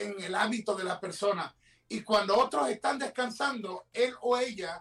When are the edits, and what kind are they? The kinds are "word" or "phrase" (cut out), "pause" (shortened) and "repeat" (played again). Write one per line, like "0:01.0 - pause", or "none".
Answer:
none